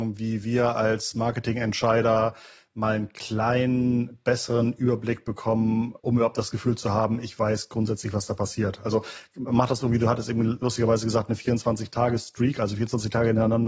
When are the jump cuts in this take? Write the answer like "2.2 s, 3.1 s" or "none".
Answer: 6.0 s